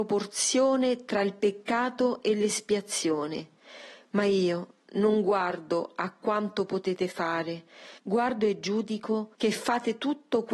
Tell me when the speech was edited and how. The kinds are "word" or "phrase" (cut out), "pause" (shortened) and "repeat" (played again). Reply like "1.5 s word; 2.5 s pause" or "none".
8.0 s pause; 9.3 s pause